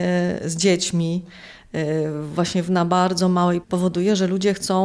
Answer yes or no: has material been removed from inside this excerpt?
yes